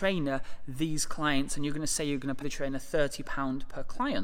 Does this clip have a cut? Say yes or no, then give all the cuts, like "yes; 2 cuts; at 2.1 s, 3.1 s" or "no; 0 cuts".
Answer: yes; 1 cut; at 2.4 s